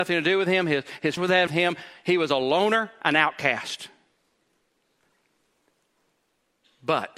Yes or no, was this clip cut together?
yes